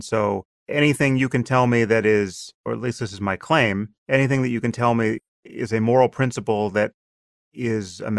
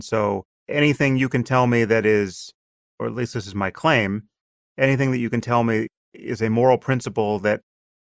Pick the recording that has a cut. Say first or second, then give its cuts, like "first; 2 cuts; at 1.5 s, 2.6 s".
first; 2 cuts; at 2.6 s, 4.0 s